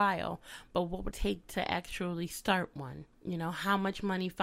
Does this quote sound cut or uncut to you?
cut